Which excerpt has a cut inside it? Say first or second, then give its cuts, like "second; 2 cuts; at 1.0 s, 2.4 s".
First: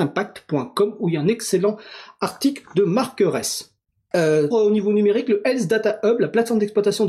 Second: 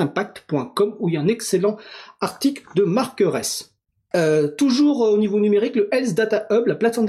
first; 1 cut; at 4.5 s